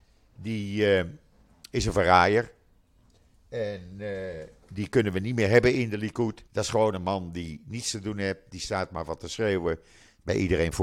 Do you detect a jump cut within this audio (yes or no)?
yes